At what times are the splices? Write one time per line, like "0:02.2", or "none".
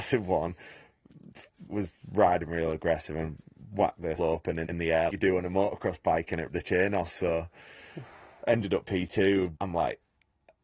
0:01.7
0:04.2
0:04.6
0:05.1
0:06.5
0:09.6